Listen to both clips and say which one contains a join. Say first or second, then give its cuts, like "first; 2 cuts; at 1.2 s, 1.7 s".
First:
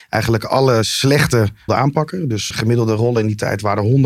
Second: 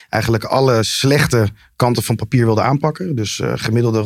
first; 2 cuts; at 1.7 s, 2.5 s